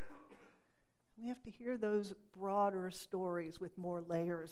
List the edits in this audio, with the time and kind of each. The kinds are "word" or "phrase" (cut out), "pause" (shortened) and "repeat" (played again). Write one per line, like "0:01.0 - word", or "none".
none